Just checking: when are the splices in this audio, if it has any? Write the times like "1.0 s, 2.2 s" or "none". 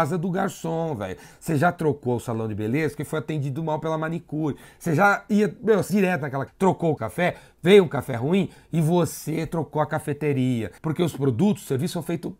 5.9 s, 6.5 s, 7.0 s, 10.8 s